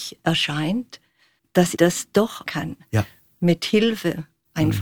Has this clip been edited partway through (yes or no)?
yes